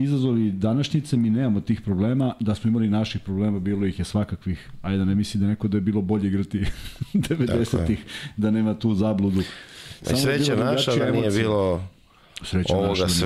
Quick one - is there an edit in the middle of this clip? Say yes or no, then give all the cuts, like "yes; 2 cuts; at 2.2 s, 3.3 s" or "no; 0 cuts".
no; 0 cuts